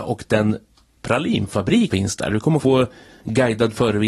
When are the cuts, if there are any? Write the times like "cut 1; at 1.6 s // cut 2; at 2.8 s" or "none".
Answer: cut 1; at 1.9 s // cut 2; at 2.6 s